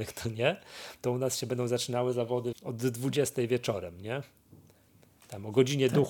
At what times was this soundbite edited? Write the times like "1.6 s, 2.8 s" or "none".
2.5 s